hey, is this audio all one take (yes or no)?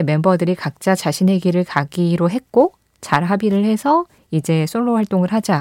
yes